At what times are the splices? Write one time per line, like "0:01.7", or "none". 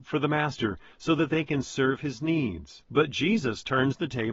0:02.9